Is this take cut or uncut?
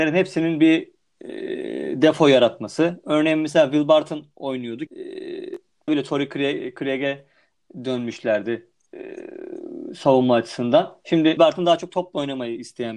cut